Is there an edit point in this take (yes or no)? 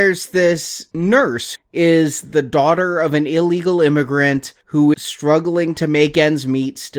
yes